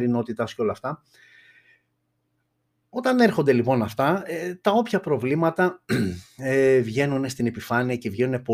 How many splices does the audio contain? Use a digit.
0